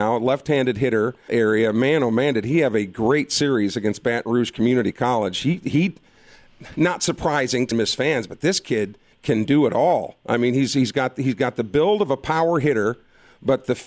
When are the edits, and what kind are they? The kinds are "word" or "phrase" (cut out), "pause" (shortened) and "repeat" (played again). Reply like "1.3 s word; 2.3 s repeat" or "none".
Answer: 1.3 s phrase; 7.7 s word; 9.1 s pause